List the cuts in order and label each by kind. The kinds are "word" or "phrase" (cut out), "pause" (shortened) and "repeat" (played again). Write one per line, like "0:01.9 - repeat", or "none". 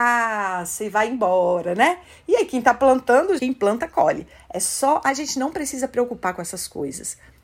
0:03.4 - word